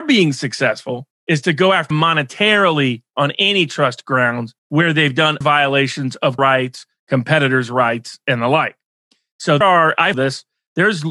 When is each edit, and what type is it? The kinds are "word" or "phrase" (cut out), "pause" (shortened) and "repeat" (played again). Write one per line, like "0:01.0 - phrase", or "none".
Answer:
0:01.1 - pause
0:01.9 - word
0:04.6 - pause
0:05.4 - word
0:06.4 - word
0:09.6 - word
0:10.1 - word